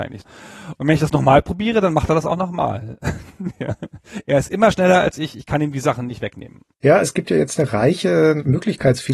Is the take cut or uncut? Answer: uncut